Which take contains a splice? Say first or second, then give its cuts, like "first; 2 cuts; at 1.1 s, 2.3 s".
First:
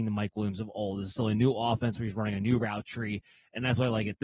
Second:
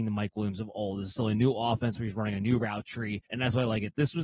second; 1 cut; at 3.3 s